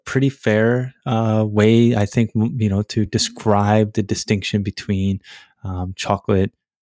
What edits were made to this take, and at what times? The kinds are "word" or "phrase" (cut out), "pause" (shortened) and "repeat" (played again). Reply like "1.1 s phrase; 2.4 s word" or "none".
none